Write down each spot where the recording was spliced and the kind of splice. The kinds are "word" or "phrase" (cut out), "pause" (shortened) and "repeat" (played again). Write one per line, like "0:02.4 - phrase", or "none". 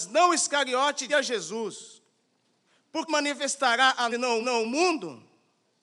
0:01.1 - word
0:02.7 - pause
0:03.1 - phrase
0:04.1 - word
0:04.4 - repeat